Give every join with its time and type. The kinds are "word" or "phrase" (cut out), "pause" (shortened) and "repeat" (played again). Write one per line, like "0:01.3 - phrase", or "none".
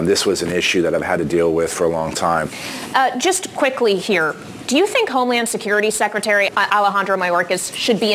0:06.5 - word